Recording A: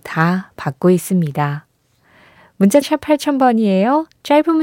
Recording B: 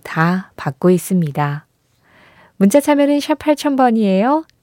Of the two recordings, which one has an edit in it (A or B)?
A